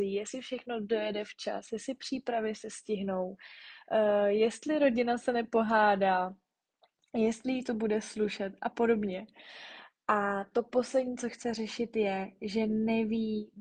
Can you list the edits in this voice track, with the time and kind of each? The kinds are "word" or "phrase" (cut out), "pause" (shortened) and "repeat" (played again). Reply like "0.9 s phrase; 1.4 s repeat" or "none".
none

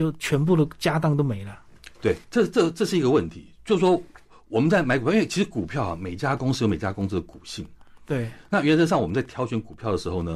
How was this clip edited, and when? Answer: 2.2 s pause

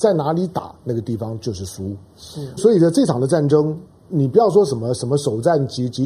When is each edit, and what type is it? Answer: 2.6 s word

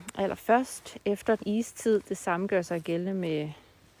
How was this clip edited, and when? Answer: 1.4 s word

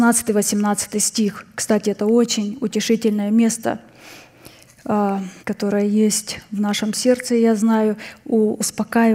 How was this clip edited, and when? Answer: 5.4 s pause

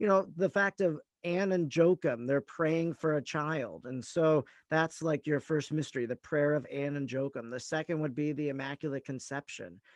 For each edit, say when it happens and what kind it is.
none

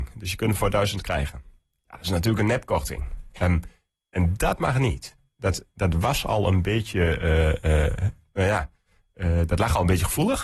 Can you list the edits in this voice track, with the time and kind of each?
none

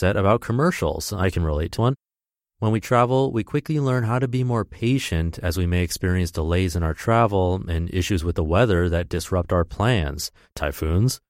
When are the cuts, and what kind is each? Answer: 1.8 s word

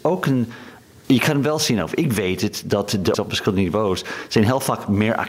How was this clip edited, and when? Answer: 3.1 s word

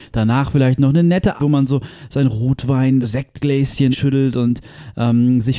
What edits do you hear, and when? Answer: 1.4 s word; 3.0 s word; 3.9 s word

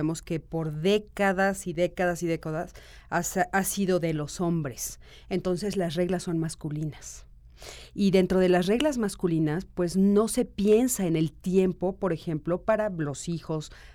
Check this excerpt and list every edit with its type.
none

